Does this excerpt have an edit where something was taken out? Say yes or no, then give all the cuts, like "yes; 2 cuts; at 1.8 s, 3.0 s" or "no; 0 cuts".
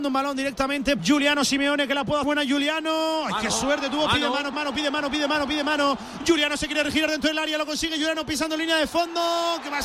yes; 3 cuts; at 1.0 s, 2.2 s, 4.5 s